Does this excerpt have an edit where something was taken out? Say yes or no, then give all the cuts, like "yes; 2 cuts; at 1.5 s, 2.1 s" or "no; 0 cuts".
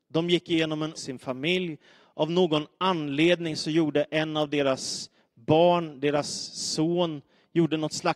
yes; 1 cut; at 1.0 s